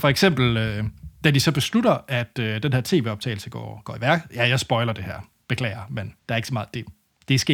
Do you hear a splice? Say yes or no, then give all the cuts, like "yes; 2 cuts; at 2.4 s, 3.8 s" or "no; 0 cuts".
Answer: yes; 1 cut; at 6.2 s